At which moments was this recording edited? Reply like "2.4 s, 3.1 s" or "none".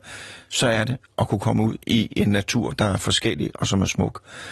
1.8 s